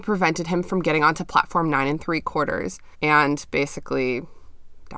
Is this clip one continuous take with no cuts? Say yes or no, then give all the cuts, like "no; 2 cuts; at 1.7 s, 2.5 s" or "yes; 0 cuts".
no; 1 cut; at 2.9 s